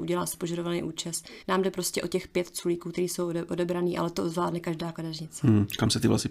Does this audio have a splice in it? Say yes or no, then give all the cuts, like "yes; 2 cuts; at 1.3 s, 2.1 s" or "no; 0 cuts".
yes; 1 cut; at 1.4 s